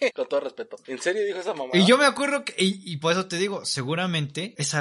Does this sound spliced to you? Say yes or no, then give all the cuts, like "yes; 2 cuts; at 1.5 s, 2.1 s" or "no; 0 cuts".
no; 0 cuts